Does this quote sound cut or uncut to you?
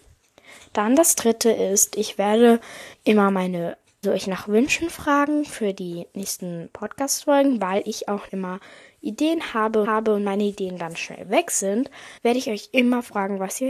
cut